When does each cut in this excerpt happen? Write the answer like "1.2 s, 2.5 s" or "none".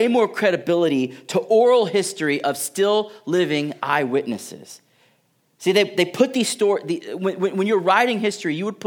none